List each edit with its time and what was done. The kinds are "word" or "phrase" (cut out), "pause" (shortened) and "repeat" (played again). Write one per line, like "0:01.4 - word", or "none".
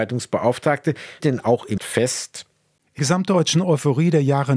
0:01.2 - word
0:01.8 - word
0:03.0 - word